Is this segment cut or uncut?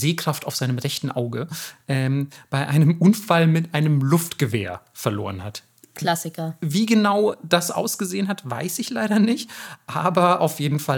uncut